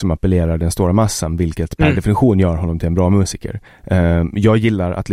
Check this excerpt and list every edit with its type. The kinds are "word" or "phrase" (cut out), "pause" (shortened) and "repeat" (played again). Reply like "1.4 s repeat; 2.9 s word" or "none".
3.7 s pause